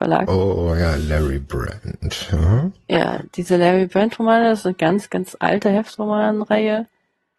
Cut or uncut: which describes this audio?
uncut